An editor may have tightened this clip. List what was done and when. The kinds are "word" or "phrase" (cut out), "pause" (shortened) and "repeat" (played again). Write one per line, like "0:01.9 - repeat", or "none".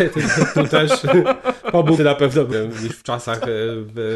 0:02.0 - word
0:02.5 - phrase

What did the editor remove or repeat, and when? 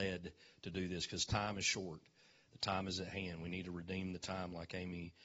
none

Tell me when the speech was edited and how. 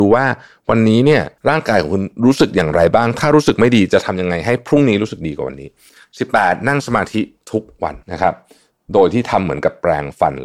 0:01.4 - pause
0:08.0 - pause

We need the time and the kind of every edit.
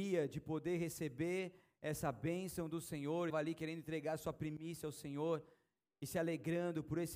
0:03.3 - word

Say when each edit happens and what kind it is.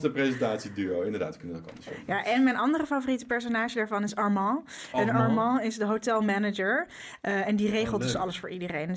none

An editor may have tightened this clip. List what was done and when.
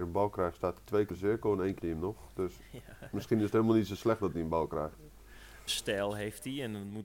0:01.1 - word
0:01.8 - word
0:05.7 - word

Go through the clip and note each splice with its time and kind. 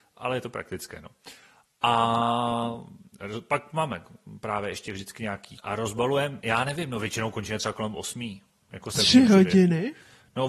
0:05.6 - word

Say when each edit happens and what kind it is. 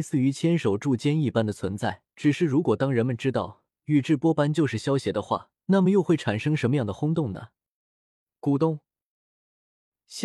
0:02.1 - pause
0:03.7 - pause
0:05.6 - pause

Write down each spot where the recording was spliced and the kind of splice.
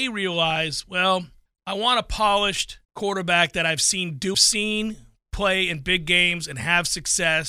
0:01.5 - pause
0:02.8 - pause
0:04.3 - phrase

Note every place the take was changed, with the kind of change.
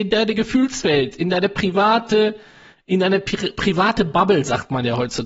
none

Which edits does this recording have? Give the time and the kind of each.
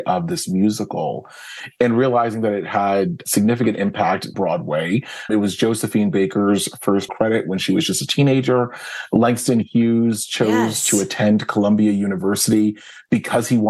0:04.3 - word
0:05.3 - word
0:07.1 - word

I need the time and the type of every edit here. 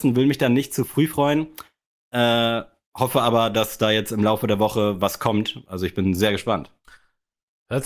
none

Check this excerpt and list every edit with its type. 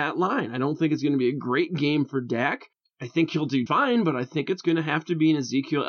0:02.7 - pause
0:03.7 - word

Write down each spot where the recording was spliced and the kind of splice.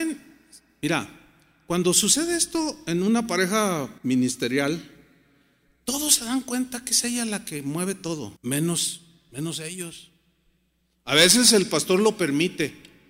0:04.0 - pause
0:08.4 - pause

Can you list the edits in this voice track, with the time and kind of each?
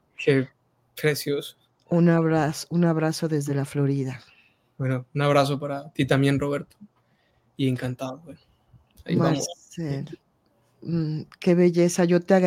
none

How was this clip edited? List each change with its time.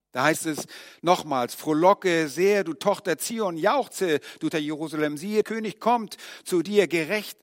0:04.5 - word
0:05.4 - word

